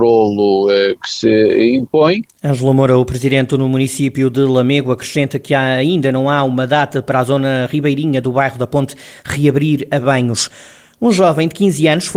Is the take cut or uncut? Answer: uncut